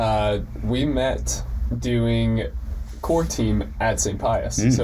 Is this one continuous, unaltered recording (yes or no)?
yes